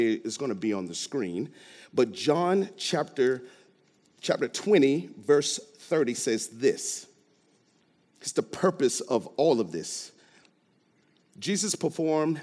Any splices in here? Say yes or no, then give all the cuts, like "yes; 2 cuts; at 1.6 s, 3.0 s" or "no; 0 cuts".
no; 0 cuts